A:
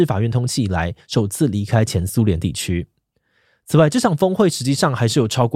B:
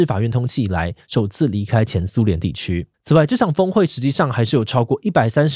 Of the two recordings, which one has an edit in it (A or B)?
B